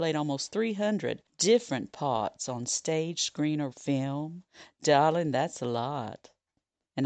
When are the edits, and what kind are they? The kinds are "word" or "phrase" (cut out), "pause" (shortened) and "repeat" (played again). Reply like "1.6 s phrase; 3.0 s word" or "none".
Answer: 3.7 s word

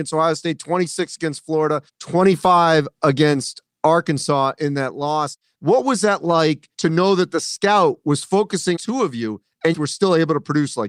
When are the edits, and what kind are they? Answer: 1.9 s pause; 6.7 s pause; 8.8 s phrase; 9.7 s phrase

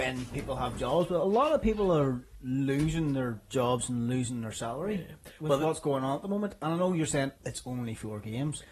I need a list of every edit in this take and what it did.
7.4 s pause

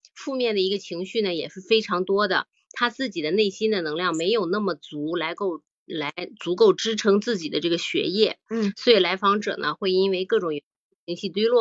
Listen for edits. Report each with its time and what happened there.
none

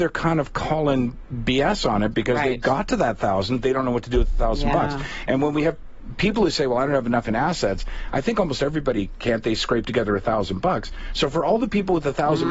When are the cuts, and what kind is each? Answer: none

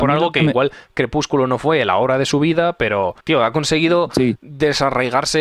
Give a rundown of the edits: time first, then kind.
3.2 s pause

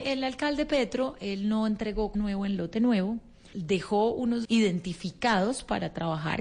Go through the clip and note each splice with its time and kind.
2.1 s word; 3.5 s word; 4.4 s word

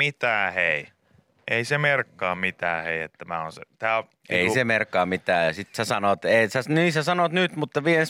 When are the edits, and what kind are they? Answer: none

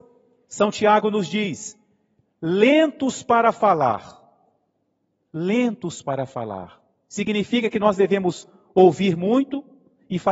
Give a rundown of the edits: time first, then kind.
none

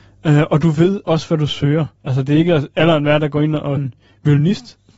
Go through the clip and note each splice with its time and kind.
2.0 s pause; 3.8 s word

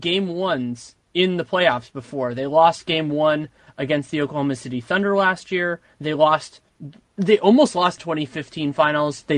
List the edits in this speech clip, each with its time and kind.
8.0 s phrase

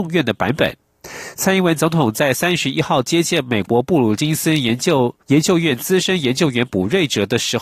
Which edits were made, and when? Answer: 5.2 s pause

